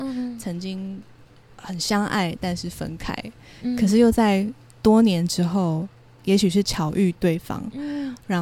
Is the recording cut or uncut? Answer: uncut